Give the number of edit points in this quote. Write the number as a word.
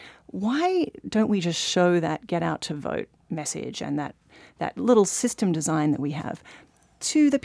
zero